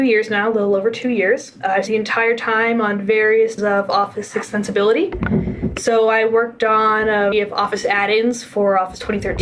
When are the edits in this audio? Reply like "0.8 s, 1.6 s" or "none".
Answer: 1.9 s, 3.6 s, 7.3 s